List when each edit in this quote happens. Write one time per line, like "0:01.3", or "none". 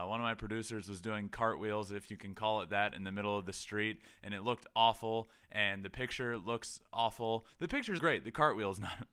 0:08.0